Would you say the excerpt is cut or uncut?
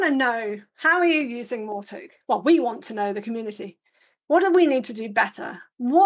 uncut